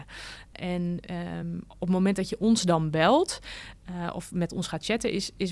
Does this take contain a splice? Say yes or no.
no